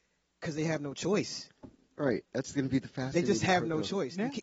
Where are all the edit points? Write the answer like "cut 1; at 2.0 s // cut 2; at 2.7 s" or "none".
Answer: none